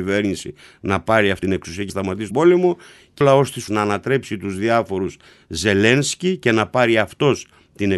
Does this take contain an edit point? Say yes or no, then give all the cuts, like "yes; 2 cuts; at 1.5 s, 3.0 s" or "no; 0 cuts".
yes; 5 cuts; at 1.4 s, 1.9 s, 2.3 s, 3.2 s, 3.7 s